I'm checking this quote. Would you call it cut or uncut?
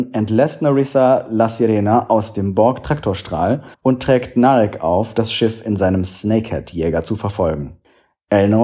cut